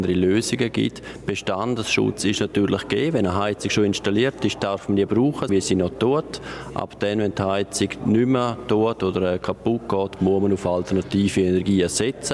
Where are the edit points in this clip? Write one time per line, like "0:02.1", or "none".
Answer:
0:05.5